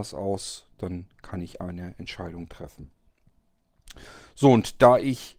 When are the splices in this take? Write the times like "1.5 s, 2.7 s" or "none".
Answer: none

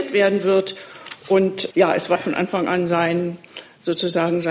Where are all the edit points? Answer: 1.7 s, 2.2 s

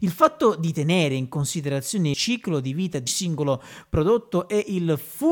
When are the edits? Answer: 2.1 s, 3.1 s

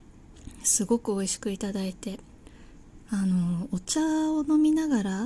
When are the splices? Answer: 3.0 s

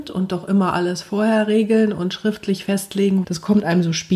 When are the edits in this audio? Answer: 3.2 s

